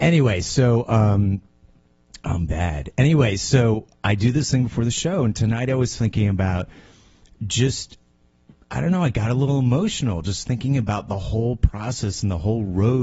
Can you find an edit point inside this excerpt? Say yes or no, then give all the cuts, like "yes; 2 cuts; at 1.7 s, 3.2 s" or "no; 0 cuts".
no; 0 cuts